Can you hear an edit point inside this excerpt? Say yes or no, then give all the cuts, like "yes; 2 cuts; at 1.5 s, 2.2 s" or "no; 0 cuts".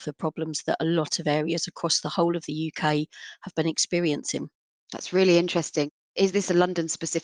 no; 0 cuts